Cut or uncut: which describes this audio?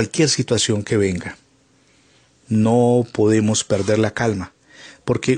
uncut